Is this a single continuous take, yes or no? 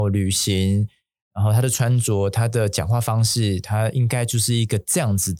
yes